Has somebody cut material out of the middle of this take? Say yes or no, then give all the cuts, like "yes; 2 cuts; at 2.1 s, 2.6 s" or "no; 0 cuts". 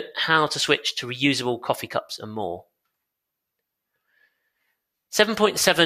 no; 0 cuts